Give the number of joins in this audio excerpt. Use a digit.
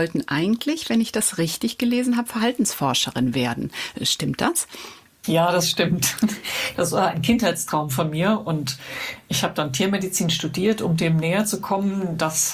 0